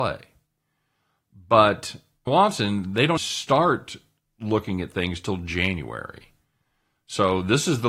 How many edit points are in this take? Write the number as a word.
two